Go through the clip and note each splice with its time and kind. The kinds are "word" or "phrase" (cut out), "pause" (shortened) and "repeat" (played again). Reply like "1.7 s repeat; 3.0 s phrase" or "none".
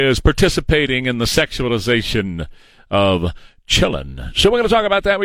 none